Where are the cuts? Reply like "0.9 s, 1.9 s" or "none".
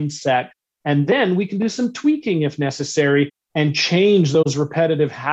none